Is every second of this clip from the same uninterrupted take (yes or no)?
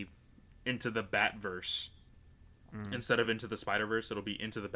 yes